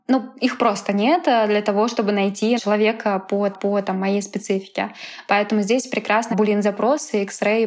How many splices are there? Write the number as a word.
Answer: three